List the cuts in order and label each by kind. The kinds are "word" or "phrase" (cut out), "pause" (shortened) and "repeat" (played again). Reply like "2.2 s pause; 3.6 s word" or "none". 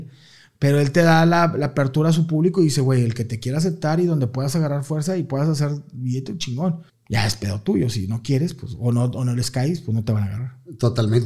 6.9 s pause